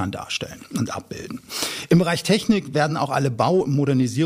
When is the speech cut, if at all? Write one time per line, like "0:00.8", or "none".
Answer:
none